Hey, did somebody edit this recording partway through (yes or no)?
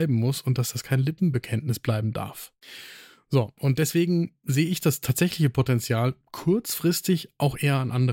no